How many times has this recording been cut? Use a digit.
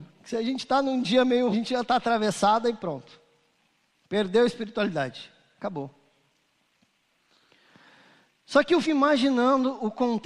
2